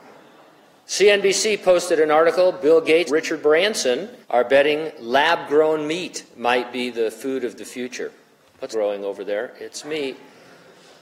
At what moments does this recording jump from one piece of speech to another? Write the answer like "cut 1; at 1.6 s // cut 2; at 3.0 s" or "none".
cut 1; at 3.1 s // cut 2; at 4.2 s // cut 3; at 8.7 s